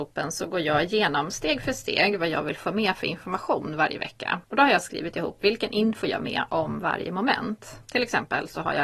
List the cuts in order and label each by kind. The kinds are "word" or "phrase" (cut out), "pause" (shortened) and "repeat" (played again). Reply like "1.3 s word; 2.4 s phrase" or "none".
4.4 s pause; 6.2 s phrase; 7.8 s pause